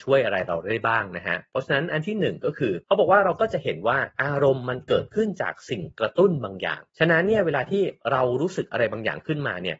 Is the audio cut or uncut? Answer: cut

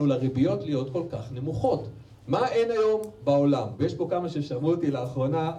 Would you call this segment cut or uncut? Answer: uncut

